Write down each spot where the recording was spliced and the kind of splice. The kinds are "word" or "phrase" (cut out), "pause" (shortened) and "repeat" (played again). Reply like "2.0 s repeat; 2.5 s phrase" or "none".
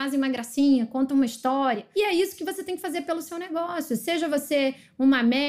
none